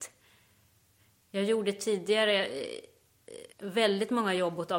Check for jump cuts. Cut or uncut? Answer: cut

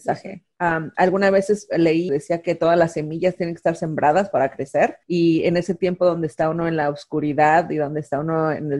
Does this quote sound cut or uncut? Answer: cut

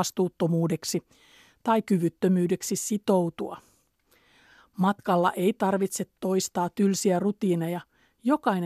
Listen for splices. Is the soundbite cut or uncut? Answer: uncut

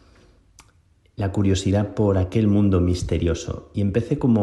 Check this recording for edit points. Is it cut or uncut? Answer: uncut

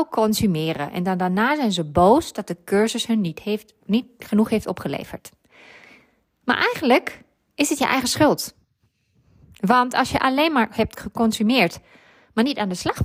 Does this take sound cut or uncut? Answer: uncut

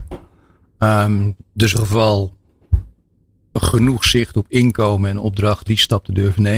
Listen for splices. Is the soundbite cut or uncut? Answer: cut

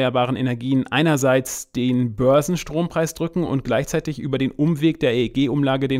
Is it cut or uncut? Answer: uncut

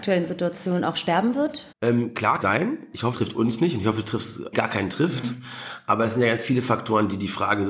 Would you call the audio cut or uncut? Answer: cut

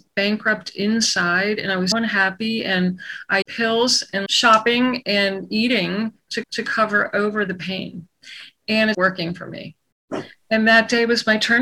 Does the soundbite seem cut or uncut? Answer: cut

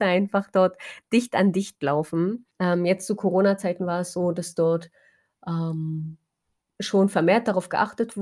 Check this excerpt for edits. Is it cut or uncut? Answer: cut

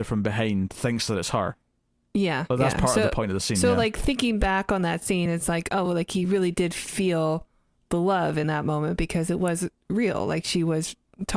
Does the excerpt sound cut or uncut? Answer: uncut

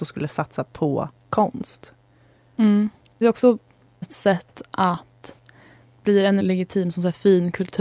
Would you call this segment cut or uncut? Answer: cut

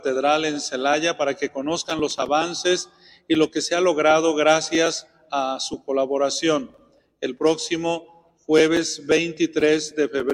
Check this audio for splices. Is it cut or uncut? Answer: uncut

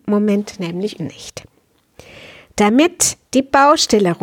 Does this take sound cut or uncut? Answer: cut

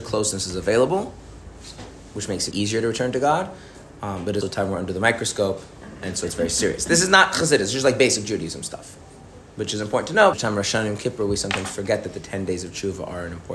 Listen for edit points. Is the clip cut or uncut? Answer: cut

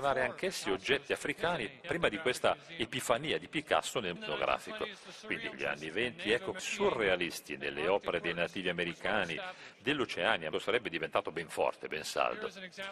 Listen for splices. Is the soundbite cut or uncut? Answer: cut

